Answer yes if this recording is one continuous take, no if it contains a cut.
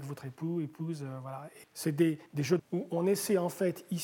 no